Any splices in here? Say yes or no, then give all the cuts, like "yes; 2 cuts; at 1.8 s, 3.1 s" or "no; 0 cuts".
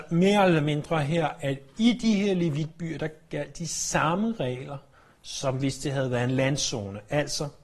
no; 0 cuts